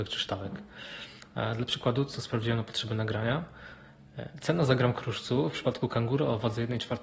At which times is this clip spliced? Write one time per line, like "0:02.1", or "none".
none